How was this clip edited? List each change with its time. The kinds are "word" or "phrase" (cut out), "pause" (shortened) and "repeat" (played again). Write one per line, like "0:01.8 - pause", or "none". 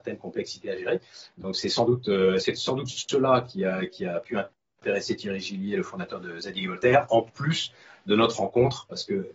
none